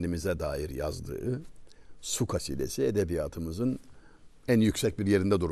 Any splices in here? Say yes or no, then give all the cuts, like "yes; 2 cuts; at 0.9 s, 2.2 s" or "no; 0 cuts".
yes; 1 cut; at 4.4 s